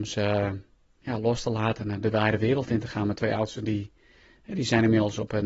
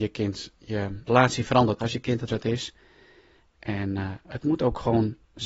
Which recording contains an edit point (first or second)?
second